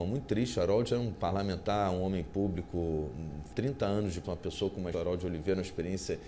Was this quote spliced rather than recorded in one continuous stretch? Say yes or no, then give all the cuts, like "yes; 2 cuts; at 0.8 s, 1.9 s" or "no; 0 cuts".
yes; 3 cuts; at 3.5 s, 4.2 s, 4.9 s